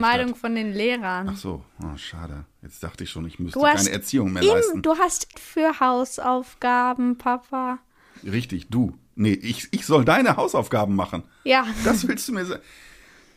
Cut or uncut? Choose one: cut